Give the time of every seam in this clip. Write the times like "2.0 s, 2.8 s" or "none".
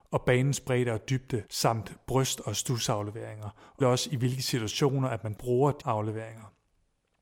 1.5 s, 3.8 s, 5.4 s, 5.8 s